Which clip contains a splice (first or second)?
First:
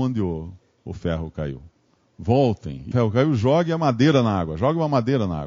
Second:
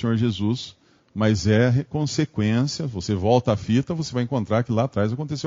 first